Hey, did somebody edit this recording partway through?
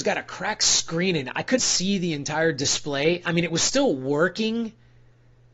yes; 1 cut; at 1.6 s

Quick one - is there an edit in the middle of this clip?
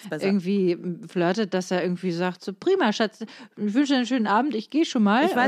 no; 0 cuts

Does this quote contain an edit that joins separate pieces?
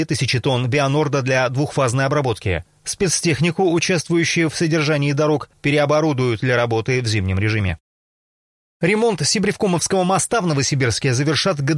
no; 0 cuts

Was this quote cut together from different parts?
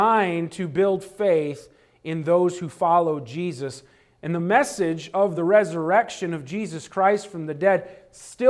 no; 0 cuts

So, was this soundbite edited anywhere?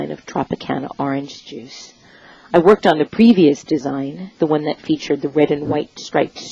no; 0 cuts

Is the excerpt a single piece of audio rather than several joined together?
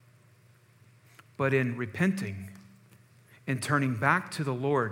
yes; 0 cuts

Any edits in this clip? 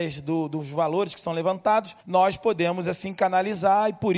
yes; 1 cut; at 2.0 s

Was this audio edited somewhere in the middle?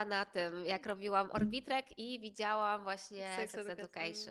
no; 0 cuts

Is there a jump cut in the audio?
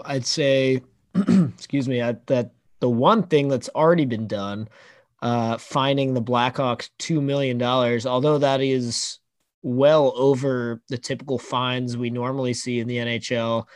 no; 0 cuts

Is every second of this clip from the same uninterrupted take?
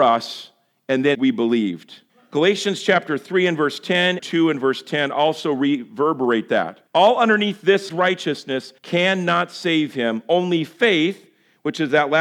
no; 6 cuts; at 1.1 s, 2.1 s, 4.2 s, 6.9 s, 7.9 s, 8.8 s

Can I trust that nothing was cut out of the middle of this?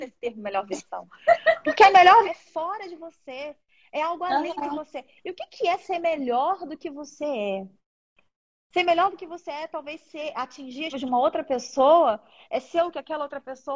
no; 2 cuts; at 2.2 s, 10.9 s

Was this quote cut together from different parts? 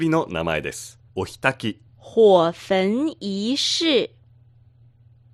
yes; 2 cuts; at 1.1 s, 1.9 s

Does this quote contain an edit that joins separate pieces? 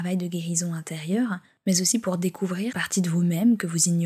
yes; 1 cut; at 2.7 s

